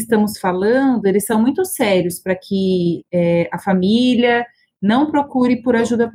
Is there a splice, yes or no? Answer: no